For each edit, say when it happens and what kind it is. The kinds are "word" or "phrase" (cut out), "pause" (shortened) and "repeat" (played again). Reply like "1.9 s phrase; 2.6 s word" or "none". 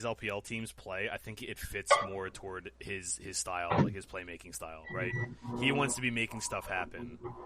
none